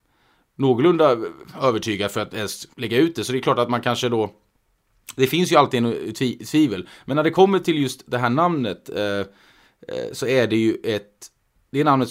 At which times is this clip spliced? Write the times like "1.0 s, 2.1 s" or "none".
2.7 s